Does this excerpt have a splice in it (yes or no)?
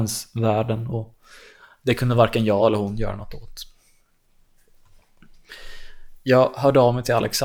no